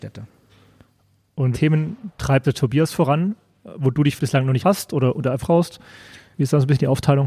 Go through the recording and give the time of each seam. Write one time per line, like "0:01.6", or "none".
0:01.5
0:02.4
0:04.2
0:04.6
0:05.4